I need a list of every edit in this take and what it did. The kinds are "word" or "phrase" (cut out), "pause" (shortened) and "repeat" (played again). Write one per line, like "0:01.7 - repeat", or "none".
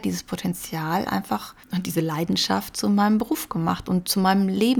0:01.6 - pause